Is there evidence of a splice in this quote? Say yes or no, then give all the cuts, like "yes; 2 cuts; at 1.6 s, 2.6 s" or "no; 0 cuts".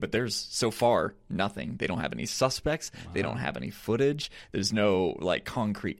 no; 0 cuts